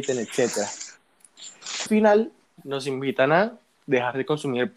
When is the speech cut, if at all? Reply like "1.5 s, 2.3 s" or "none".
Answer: 1.9 s, 2.6 s